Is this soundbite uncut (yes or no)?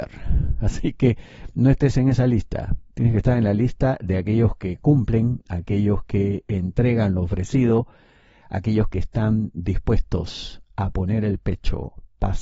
yes